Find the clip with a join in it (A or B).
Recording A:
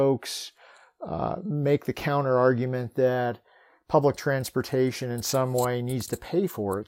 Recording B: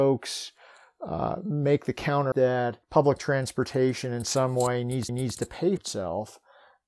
B